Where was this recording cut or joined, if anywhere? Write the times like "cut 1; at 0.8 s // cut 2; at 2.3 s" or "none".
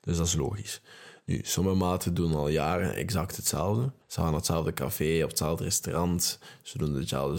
cut 1; at 4.0 s

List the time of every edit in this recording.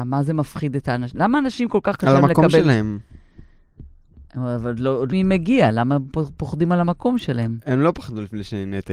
cut 1; at 5.1 s

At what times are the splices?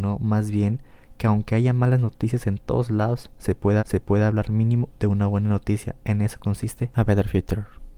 cut 1; at 3.8 s

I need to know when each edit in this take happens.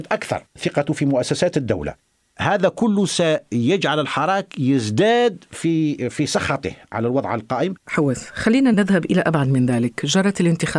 none

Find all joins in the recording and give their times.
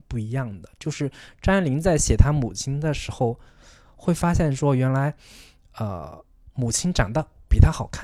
none

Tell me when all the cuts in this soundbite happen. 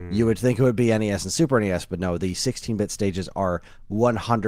none

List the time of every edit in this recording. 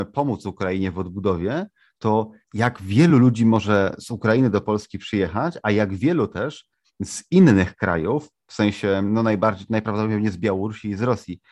none

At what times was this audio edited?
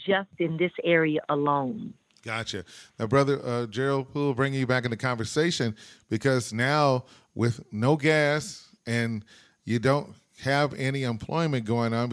none

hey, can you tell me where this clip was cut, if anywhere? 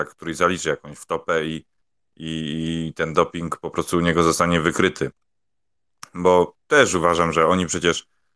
none

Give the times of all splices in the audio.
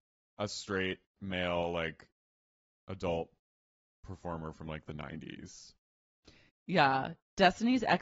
none

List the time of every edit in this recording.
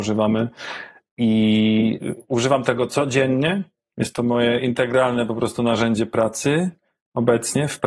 cut 1; at 2.0 s

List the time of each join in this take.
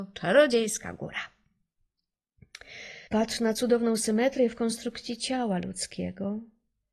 cut 1; at 3.1 s

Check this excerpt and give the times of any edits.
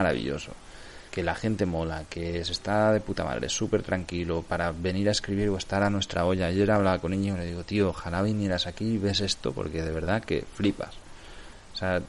cut 1; at 1.1 s

